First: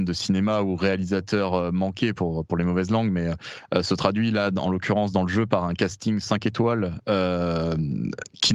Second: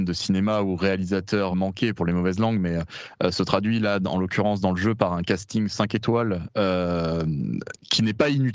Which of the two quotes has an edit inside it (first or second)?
second